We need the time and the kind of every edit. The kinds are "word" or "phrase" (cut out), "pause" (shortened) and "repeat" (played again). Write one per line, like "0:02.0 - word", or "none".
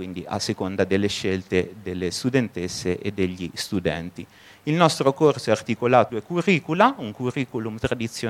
0:06.1 - word